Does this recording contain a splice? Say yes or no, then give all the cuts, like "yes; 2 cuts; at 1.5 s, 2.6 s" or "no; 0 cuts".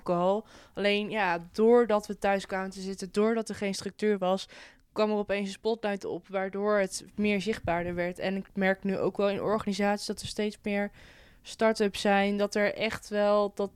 no; 0 cuts